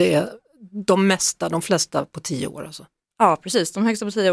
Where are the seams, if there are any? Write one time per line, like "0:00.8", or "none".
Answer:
none

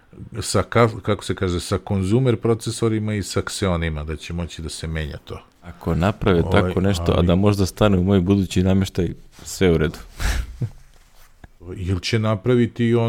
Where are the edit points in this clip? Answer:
none

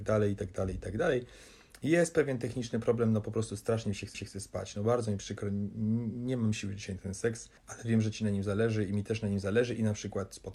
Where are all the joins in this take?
0:04.1
0:07.6

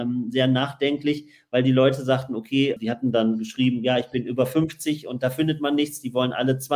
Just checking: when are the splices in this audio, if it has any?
0:02.8

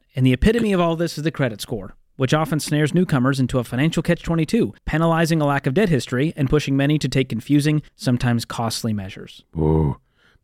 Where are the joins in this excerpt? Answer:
0:04.8
0:07.9

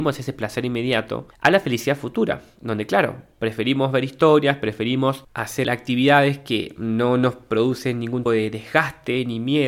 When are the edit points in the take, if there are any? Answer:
0:08.3

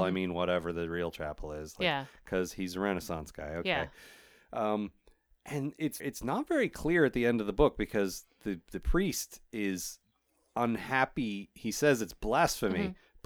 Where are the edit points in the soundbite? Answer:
0:06.0

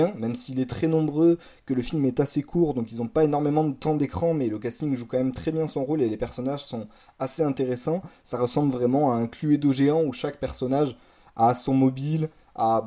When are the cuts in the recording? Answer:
none

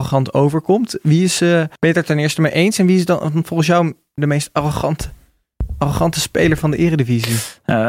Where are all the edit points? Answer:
0:01.8
0:04.2

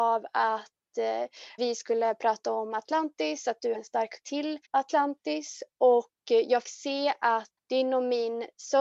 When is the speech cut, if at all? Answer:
0:01.6
0:03.7
0:04.2
0:04.6
0:06.6
0:07.6

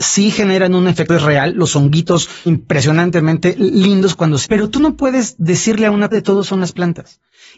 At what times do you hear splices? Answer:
0:01.1
0:02.5
0:04.4
0:06.1

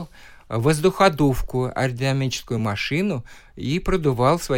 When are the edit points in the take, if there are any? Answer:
none

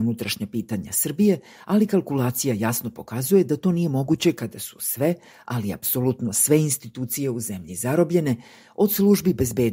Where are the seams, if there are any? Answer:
none

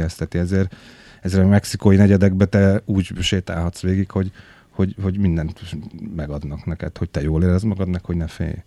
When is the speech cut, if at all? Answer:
none

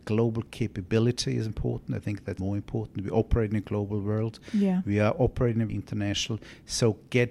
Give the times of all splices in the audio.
0:01.5
0:02.4
0:05.7

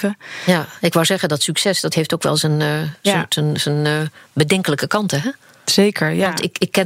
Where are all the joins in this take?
none

